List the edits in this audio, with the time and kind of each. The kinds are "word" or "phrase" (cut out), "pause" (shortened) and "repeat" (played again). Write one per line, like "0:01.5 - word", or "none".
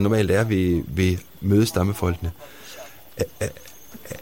0:01.3 - word

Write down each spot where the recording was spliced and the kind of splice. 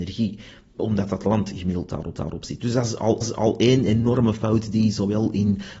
0:02.1 - repeat
0:03.2 - repeat

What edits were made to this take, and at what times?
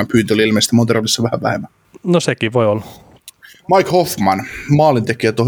none

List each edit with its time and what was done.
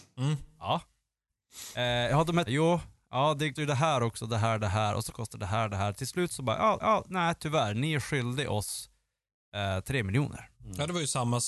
0:02.5 - word
0:03.5 - word
0:05.1 - word
0:06.8 - repeat
0:10.5 - pause

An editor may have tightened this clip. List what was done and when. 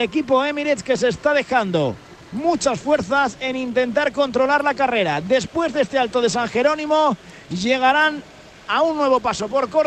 none

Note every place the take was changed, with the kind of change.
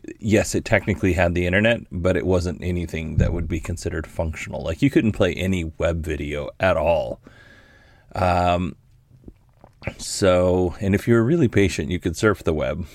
none

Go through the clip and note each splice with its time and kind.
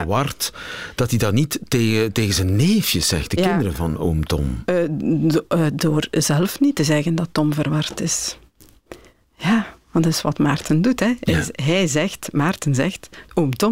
none

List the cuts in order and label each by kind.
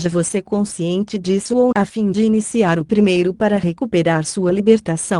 0:01.7 - word
0:03.3 - word

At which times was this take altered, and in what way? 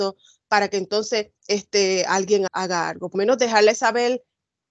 0:01.4 - pause
0:02.5 - word
0:03.1 - word

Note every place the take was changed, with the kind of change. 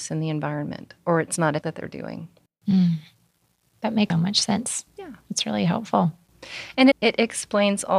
0:01.6 - word
0:04.1 - word
0:06.9 - word

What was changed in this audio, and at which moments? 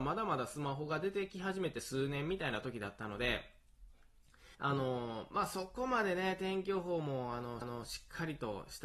0:04.5 - pause
0:07.6 - repeat

